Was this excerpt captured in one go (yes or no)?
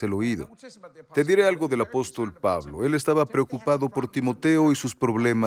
yes